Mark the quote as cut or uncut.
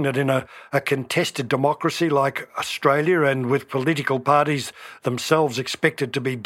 uncut